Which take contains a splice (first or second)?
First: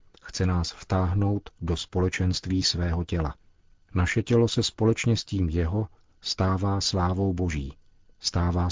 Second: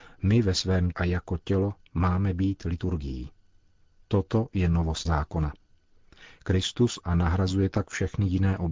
second